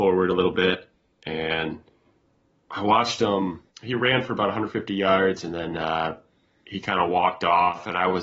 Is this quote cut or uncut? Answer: cut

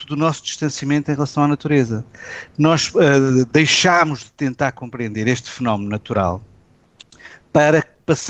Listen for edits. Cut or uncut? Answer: uncut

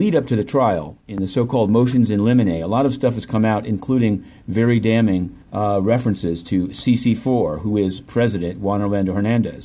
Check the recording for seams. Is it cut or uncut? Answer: cut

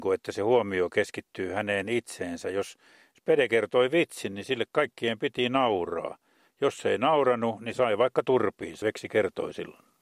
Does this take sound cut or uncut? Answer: cut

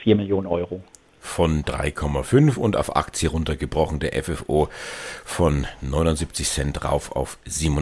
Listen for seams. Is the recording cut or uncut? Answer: uncut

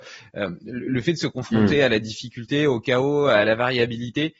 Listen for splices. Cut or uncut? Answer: uncut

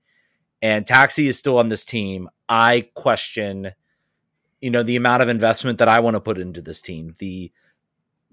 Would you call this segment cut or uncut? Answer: uncut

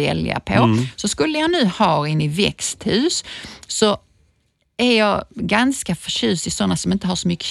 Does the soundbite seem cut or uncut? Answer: uncut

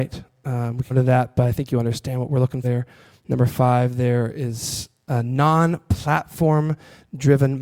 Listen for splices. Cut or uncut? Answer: cut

